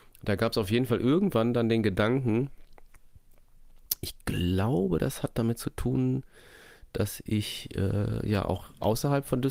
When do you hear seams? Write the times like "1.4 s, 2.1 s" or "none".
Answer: none